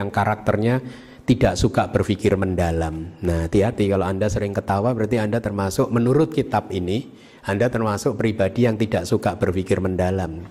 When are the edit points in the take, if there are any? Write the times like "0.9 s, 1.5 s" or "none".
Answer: none